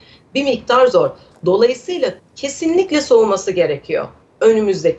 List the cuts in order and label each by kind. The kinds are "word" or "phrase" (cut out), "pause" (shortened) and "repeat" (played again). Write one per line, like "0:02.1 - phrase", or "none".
0:02.2 - word